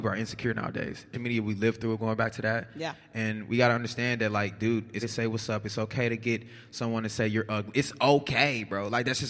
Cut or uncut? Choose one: cut